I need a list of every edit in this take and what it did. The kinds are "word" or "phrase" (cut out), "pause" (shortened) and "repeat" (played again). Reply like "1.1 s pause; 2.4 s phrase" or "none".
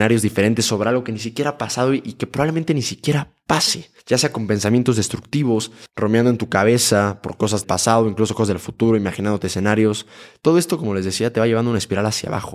4.0 s pause; 7.6 s word